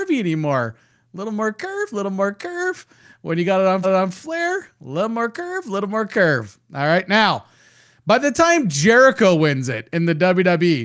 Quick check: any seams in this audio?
yes; 1 cut; at 3.8 s

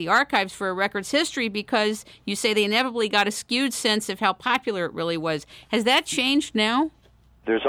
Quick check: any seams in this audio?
no; 0 cuts

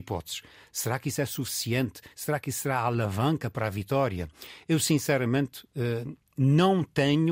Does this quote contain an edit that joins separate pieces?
no; 0 cuts

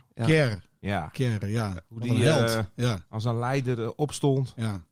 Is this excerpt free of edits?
yes; 0 cuts

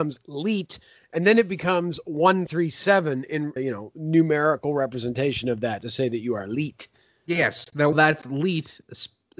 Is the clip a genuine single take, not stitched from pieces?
no; 3 cuts; at 2.5 s, 3.6 s, 7.9 s

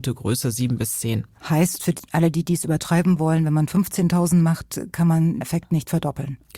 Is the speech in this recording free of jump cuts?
no; 1 cut; at 5.4 s

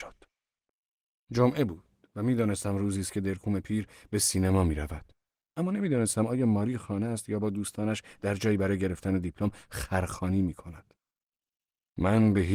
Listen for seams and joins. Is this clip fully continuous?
yes; 0 cuts

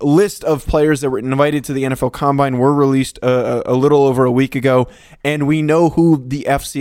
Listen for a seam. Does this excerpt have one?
no; 0 cuts

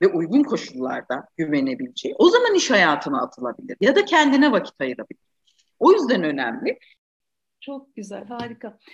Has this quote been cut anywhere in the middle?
no; 0 cuts

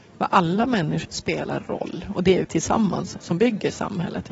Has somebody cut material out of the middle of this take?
yes; 2 cuts; at 1.0 s, 2.4 s

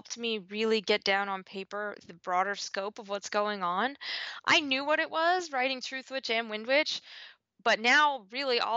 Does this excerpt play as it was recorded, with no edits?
yes; 0 cuts

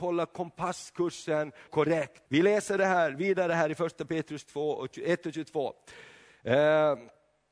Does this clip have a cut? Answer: yes; 2 cuts; at 1.7 s, 2.3 s

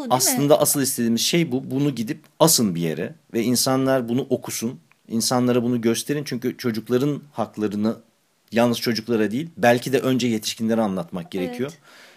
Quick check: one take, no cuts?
yes; 0 cuts

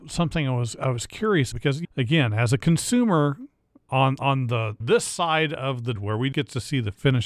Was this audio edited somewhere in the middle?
yes; 6 cuts; at 1.5 s, 1.8 s, 3.9 s, 4.8 s, 5.9 s, 6.3 s

